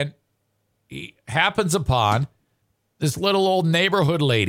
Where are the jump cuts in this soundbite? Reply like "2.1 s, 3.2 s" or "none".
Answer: none

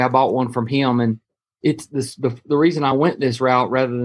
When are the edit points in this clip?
none

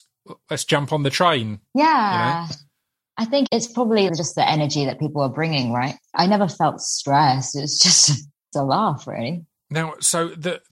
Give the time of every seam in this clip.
3.5 s, 4.1 s, 8.5 s

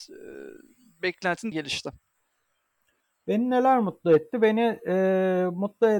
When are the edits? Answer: 1.5 s

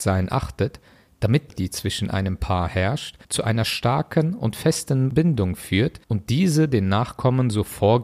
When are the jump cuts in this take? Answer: 1.5 s, 3.2 s, 6.0 s

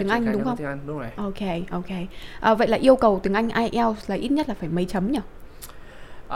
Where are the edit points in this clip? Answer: none

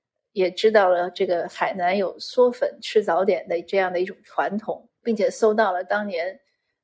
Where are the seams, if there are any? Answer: 4.9 s

